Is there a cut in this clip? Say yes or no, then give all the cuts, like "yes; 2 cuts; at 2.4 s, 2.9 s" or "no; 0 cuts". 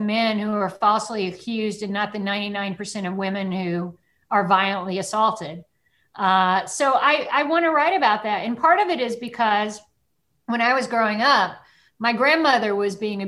no; 0 cuts